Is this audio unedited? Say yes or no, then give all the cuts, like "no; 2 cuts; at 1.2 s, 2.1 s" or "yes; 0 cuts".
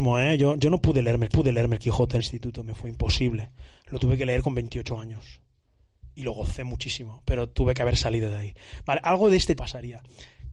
no; 3 cuts; at 1.3 s, 2.2 s, 9.6 s